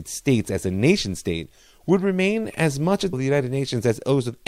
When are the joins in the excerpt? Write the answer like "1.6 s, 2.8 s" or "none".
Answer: 3.1 s